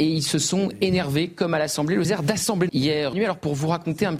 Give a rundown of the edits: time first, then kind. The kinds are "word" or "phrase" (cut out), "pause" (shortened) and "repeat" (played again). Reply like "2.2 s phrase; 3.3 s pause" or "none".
2.0 s phrase; 2.7 s word; 3.1 s phrase